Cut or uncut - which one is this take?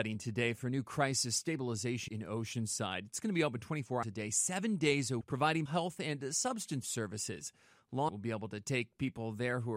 cut